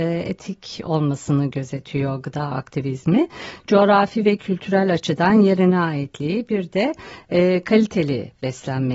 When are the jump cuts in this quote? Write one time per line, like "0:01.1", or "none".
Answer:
none